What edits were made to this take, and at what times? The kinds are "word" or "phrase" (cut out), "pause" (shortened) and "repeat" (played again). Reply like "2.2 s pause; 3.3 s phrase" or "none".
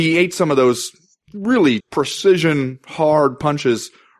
1.8 s word